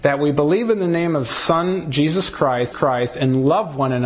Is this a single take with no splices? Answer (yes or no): no